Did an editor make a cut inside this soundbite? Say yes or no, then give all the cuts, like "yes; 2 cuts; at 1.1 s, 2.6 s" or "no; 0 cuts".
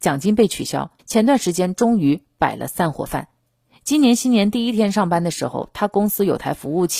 yes; 2 cuts; at 1.0 s, 3.6 s